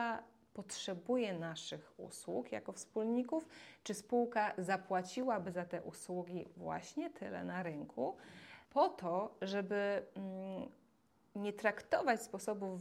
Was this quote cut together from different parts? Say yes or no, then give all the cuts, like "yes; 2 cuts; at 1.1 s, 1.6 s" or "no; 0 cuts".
yes; 2 cuts; at 8.6 s, 11.1 s